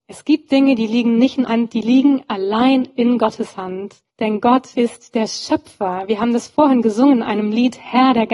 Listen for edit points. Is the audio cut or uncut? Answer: cut